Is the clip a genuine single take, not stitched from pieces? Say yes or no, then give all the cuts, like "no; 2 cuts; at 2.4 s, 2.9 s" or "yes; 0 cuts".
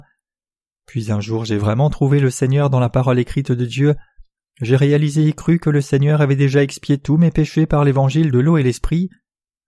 yes; 0 cuts